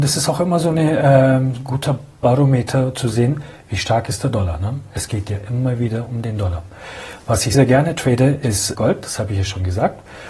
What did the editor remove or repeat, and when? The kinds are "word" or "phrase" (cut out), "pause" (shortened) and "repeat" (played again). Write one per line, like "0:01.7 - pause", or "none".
0:07.5 - word
0:08.7 - word

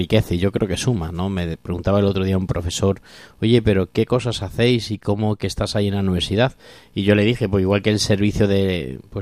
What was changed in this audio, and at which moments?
none

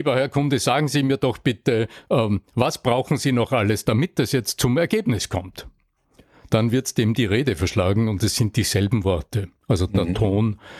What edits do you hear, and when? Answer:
none

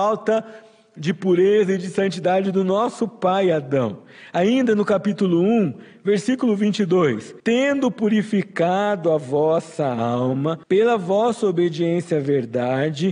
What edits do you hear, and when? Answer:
0:07.4 - pause
0:10.6 - pause

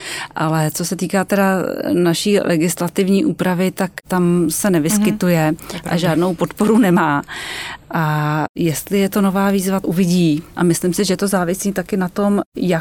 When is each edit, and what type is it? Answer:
0:09.8 - word
0:10.5 - pause

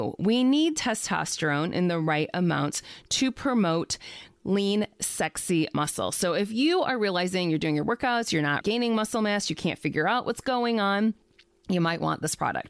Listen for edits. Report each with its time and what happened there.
0:08.6 - word

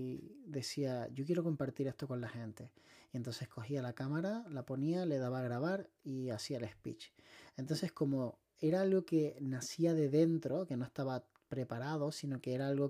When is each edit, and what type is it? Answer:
none

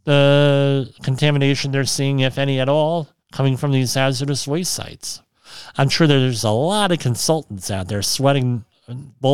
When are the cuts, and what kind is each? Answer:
0:03.2 - pause

